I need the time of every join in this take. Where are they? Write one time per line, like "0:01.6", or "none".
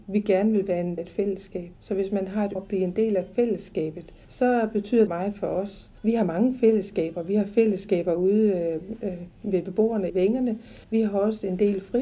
0:01.0
0:01.8
0:02.6
0:04.2
0:05.1
0:06.0
0:10.1
0:10.8